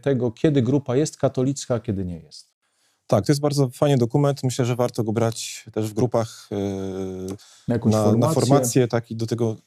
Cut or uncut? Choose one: uncut